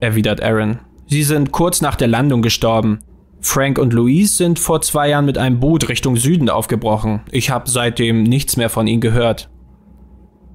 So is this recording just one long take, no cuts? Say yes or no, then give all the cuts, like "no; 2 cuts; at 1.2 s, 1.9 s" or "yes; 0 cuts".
yes; 0 cuts